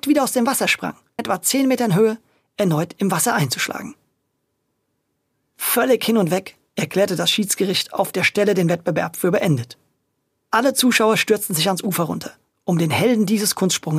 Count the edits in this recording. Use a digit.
1